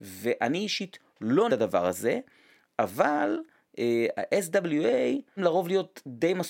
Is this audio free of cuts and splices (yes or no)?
no